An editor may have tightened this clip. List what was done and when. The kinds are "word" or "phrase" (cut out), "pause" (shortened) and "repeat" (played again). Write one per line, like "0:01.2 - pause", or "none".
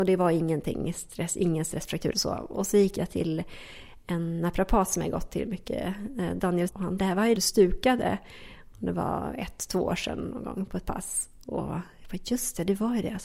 0:02.1 - word
0:06.7 - word
0:07.0 - phrase
0:07.3 - phrase

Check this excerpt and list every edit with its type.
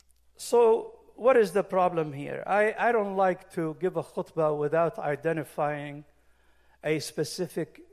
none

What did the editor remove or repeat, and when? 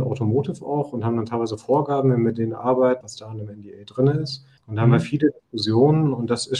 0:03.0 - word
0:04.6 - pause

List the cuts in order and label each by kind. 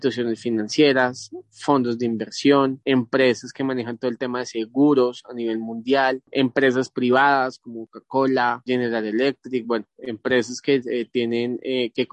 none

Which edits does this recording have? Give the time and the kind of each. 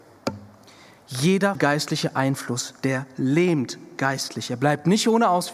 0:01.5 - word

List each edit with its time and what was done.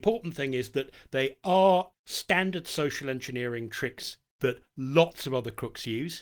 0:01.9 - word

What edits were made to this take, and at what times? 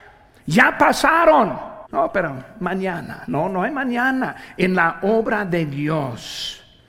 0:01.9 - pause

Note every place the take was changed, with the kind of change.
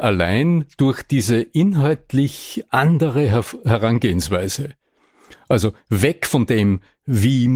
none

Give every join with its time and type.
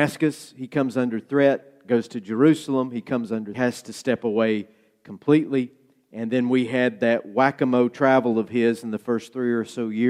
0:03.5 - phrase

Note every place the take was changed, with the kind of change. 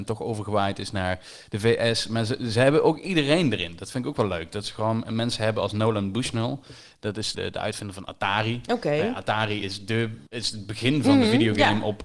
0:07.3 - word
0:10.3 - pause

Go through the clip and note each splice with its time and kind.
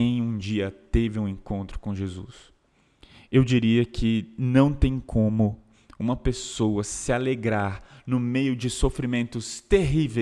none

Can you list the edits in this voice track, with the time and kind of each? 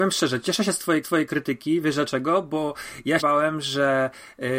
0:01.0 - repeat
0:03.2 - word

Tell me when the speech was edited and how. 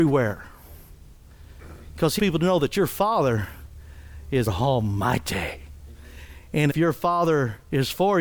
0:02.2 - word
0:04.5 - word
0:06.7 - word

